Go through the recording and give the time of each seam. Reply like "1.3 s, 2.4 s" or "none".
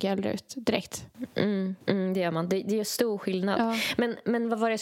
1.8 s